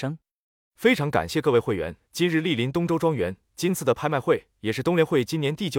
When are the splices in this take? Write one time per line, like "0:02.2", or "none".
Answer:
0:02.0